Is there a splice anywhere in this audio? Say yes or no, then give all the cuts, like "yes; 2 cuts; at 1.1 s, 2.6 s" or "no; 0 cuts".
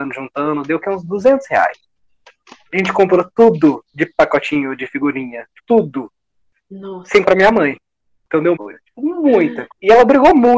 yes; 4 cuts; at 3.9 s, 5.6 s, 7.2 s, 8.6 s